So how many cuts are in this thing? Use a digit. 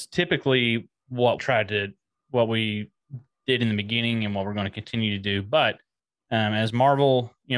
1